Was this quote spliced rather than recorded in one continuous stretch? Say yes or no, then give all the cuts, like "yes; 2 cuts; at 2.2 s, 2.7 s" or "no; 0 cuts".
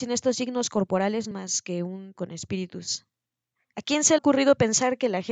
yes; 3 cuts; at 1.3 s, 2.2 s, 4.2 s